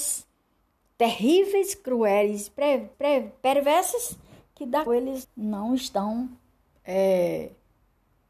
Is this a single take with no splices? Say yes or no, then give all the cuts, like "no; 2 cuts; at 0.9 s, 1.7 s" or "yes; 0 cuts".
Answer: no; 3 cuts; at 2.9 s, 4.9 s, 5.2 s